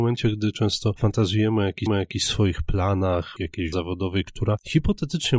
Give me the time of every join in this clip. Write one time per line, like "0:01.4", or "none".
0:01.9
0:03.4
0:03.7